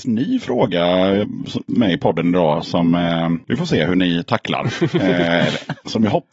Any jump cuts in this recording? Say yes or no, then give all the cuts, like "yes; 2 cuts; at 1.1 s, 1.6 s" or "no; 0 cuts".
no; 0 cuts